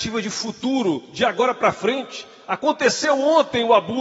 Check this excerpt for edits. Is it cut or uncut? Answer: uncut